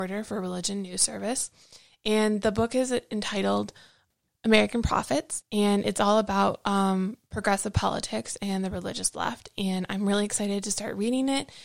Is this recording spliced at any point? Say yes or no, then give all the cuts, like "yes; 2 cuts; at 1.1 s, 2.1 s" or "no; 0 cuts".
no; 0 cuts